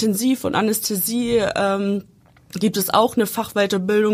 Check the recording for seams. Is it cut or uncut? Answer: uncut